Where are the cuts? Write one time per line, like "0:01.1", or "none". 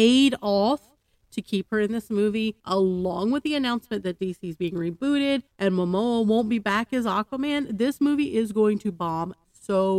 0:02.6
0:05.5